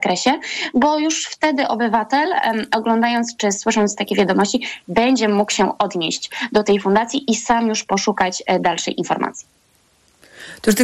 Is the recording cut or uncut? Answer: uncut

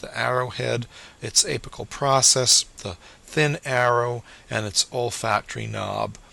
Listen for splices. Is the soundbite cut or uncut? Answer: uncut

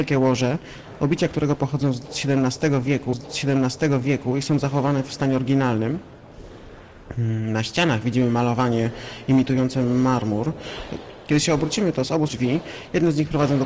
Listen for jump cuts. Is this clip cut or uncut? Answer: cut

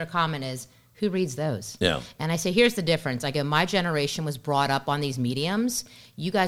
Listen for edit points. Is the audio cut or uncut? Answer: uncut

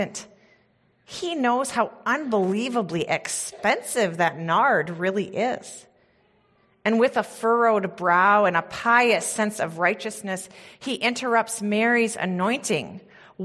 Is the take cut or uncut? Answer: uncut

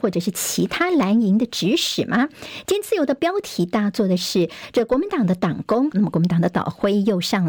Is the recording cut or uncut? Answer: cut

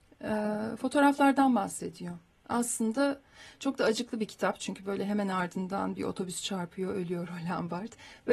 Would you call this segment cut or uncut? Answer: uncut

